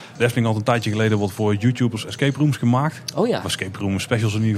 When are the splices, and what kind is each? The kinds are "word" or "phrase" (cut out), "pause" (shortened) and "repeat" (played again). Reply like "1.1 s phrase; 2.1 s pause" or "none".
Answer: none

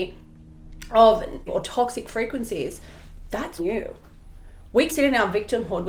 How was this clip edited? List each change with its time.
1.5 s word; 3.6 s word; 4.9 s word

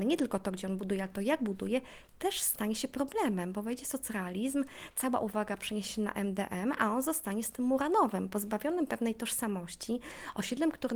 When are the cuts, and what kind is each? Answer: none

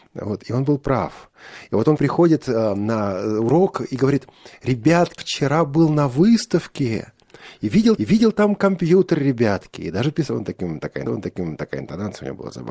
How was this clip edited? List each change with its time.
2.0 s word; 5.2 s word; 8.0 s repeat; 11.1 s repeat

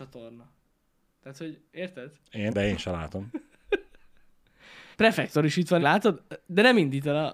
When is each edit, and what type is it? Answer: 1.7 s pause; 2.5 s word; 4.9 s pause; 5.8 s word

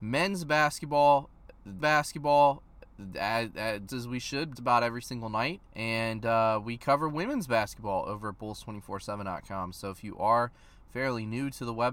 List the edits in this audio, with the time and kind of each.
1.8 s repeat; 3.9 s word; 4.6 s word; 5.7 s pause

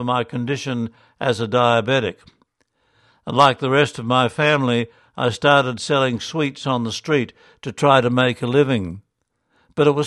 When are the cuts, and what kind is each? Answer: none

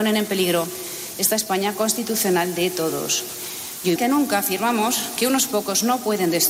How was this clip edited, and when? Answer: 4.0 s word

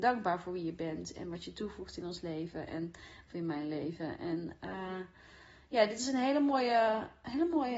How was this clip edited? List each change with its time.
none

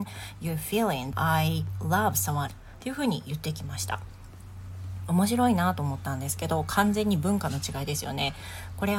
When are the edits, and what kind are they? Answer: 1.1 s word; 2.5 s word

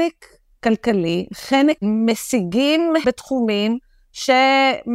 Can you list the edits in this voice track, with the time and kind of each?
1.8 s word; 3.0 s word

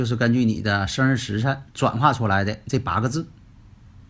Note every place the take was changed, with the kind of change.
1.7 s pause

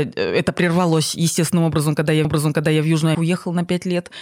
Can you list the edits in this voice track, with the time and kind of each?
2.2 s repeat; 3.1 s word

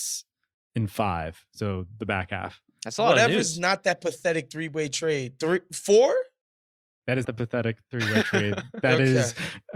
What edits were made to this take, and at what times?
7.2 s word

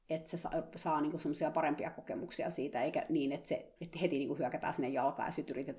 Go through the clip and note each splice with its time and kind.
3.8 s pause

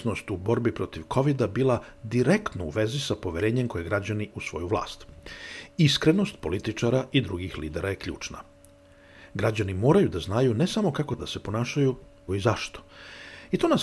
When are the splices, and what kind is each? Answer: 4.3 s word; 11.2 s word; 12.3 s word

